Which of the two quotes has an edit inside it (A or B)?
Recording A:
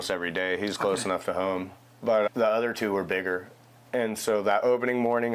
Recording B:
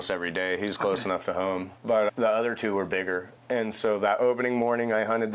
B